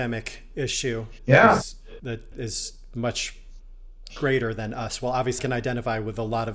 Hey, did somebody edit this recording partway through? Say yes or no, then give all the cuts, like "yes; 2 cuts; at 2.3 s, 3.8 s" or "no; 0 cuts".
yes; 4 cuts; at 1.2 s, 2.0 s, 2.3 s, 5.4 s